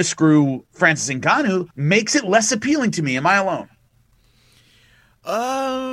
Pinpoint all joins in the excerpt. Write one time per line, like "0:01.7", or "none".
0:01.7

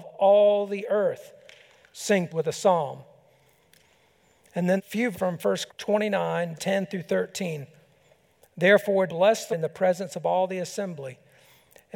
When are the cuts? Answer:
0:02.3
0:04.8
0:05.1
0:05.7
0:06.6
0:09.1
0:09.5

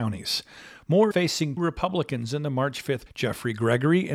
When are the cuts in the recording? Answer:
0:01.1
0:01.6
0:03.1

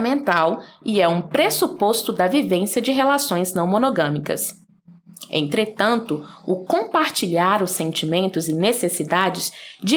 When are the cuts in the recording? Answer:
none

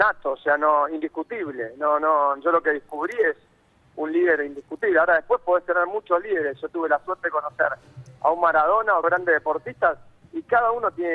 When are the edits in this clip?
0:09.0

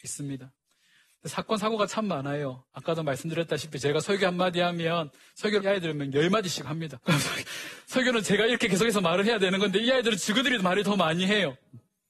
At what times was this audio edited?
0:05.6
0:07.0

